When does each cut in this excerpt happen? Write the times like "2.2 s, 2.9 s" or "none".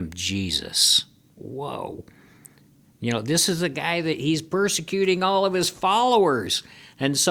none